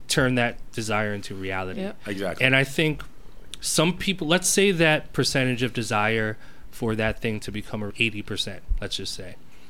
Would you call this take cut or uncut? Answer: cut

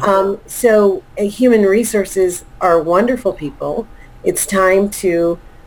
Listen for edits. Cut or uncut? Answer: uncut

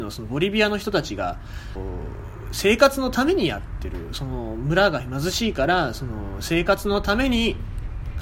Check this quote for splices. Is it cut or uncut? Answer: cut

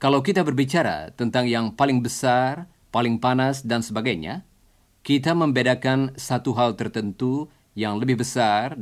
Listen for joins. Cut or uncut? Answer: uncut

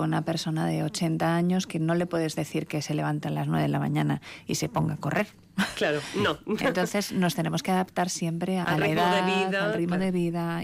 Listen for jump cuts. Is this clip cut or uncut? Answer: uncut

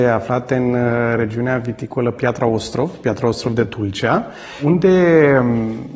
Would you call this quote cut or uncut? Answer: uncut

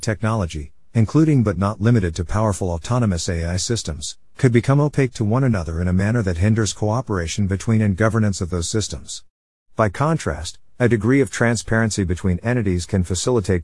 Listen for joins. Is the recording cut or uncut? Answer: uncut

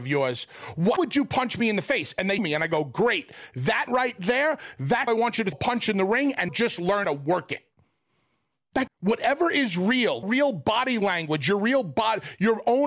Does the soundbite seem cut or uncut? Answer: cut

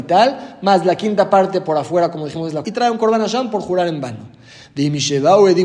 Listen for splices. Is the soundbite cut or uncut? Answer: cut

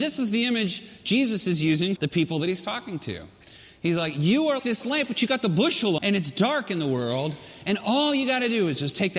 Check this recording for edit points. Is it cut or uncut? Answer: cut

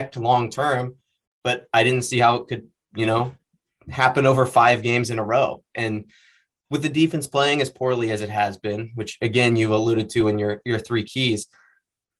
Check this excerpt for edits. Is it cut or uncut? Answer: uncut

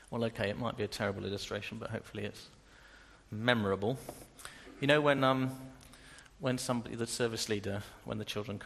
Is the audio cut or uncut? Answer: uncut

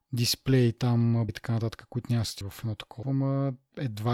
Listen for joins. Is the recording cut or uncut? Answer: cut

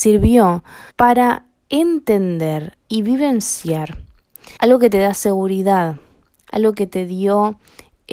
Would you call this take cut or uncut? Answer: cut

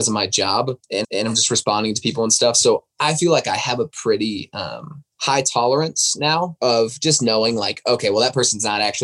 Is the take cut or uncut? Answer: cut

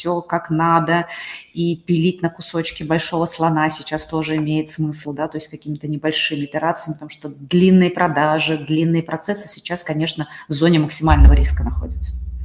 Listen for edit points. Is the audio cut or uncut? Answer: uncut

